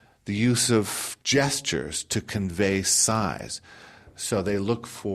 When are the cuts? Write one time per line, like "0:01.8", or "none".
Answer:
none